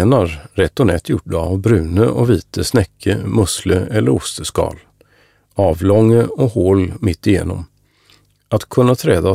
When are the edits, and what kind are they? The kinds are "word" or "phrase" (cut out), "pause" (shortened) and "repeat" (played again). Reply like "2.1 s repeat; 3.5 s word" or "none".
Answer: none